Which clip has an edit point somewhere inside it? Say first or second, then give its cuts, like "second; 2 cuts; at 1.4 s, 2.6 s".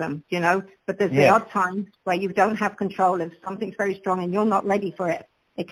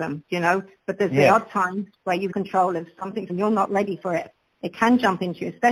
second; 2 cuts; at 2.3 s, 3.3 s